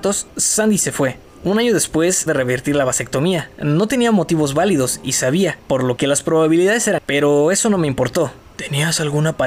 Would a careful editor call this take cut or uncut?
cut